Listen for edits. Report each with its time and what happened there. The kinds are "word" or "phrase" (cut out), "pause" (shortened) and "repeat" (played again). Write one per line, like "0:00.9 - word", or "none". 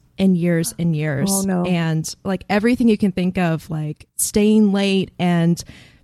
0:04.1 - pause